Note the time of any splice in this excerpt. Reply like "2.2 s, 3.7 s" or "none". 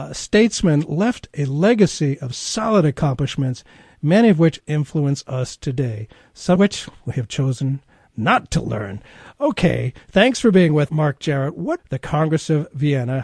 4.6 s, 6.6 s, 10.9 s, 11.8 s